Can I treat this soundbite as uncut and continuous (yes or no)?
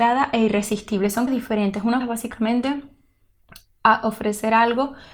no